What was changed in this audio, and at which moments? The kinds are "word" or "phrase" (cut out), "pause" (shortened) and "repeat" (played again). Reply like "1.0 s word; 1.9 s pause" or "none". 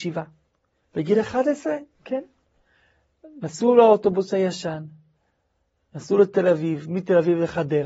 none